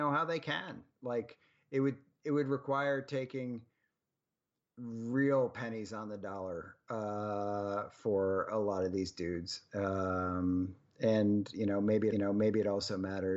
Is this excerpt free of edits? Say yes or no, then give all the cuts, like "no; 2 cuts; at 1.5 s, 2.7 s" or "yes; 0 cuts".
no; 1 cut; at 12.1 s